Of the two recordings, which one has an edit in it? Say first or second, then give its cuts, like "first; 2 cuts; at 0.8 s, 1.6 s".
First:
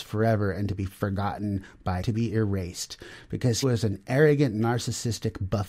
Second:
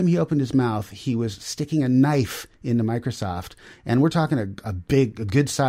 first; 2 cuts; at 2.0 s, 3.6 s